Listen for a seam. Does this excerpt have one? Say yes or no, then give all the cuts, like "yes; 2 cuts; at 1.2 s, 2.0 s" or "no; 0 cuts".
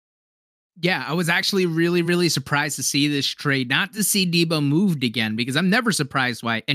no; 0 cuts